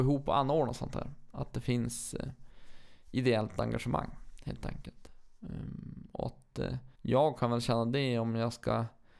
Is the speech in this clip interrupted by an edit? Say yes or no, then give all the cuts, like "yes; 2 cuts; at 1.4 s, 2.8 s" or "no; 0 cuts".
yes; 1 cut; at 6.9 s